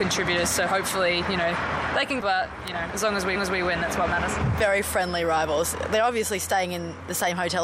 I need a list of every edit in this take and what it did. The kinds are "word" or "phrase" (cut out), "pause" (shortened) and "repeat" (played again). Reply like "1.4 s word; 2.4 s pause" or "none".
2.2 s phrase; 3.4 s repeat